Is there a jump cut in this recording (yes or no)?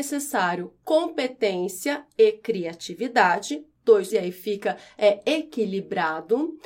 yes